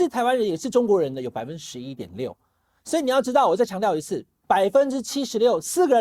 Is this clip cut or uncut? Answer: uncut